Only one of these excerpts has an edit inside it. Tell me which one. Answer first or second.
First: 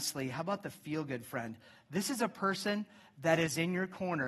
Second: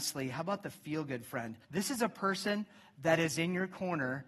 second